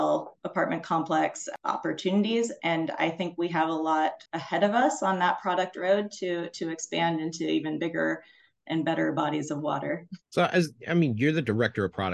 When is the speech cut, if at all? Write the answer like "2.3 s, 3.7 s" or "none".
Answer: 4.3 s, 10.2 s